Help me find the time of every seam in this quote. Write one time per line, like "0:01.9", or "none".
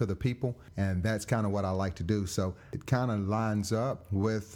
none